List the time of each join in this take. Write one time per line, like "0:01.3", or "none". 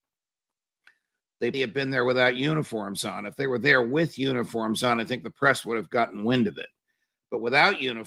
0:01.5